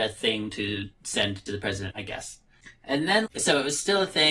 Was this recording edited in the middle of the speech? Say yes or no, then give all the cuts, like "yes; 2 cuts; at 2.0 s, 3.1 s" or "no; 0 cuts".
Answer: yes; 3 cuts; at 1.5 s, 1.9 s, 3.3 s